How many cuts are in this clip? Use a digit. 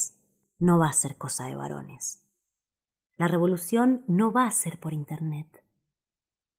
0